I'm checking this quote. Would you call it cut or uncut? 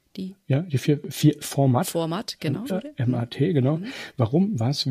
cut